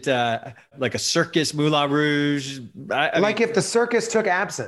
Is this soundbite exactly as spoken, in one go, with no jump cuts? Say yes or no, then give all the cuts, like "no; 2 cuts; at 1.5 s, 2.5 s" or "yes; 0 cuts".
yes; 0 cuts